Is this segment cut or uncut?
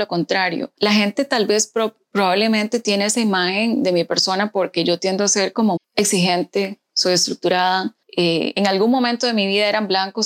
cut